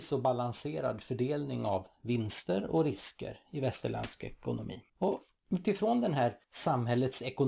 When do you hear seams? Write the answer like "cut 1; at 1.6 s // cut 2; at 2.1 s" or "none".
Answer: cut 1; at 4.9 s // cut 2; at 6.4 s